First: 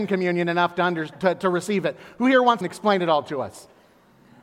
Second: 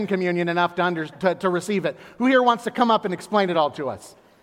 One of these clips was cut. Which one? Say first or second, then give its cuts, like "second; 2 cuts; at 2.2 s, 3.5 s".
first; 1 cut; at 2.6 s